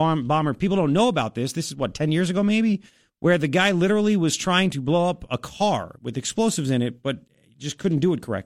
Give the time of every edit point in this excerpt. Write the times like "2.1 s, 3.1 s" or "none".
none